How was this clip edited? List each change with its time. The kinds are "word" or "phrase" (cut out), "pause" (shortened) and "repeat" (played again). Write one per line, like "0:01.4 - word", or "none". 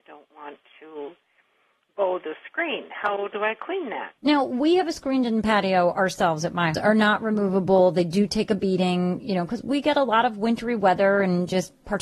0:04.2 - pause
0:06.7 - phrase